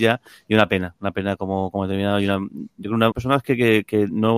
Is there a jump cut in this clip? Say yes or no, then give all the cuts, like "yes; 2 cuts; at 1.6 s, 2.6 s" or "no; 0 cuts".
yes; 1 cut; at 3.1 s